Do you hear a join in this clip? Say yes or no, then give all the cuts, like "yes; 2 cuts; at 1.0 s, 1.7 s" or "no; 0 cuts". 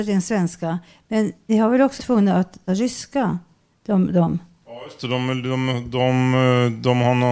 yes; 3 cuts; at 1.5 s, 2.0 s, 2.7 s